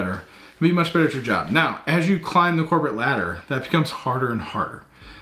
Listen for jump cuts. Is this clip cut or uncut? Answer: uncut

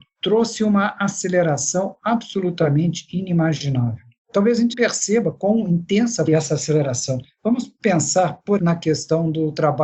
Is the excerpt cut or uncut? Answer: cut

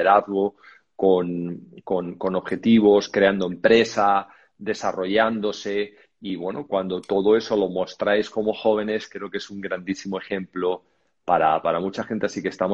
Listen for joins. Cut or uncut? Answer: uncut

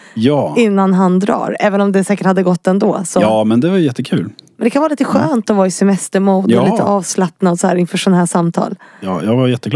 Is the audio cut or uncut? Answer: uncut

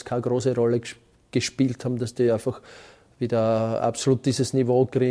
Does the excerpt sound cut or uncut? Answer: uncut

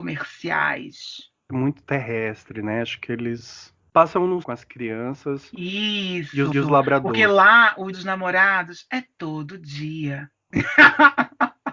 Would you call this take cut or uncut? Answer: cut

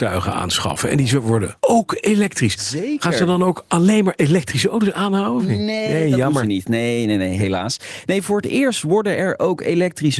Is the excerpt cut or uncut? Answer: cut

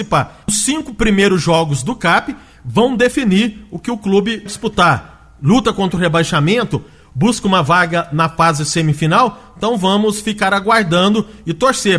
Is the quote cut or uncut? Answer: cut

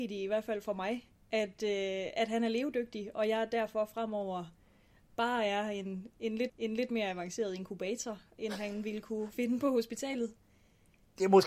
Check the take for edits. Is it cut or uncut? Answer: cut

